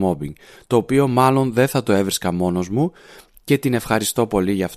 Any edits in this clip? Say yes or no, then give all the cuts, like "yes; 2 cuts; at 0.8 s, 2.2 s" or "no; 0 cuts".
no; 0 cuts